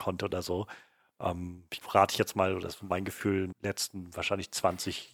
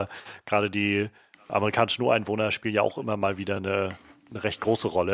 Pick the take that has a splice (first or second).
first